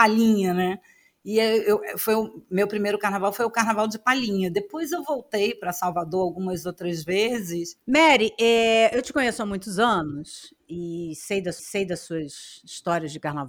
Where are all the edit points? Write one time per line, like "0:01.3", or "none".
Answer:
0:11.6